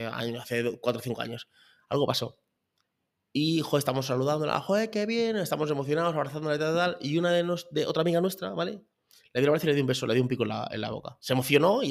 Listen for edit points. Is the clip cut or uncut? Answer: uncut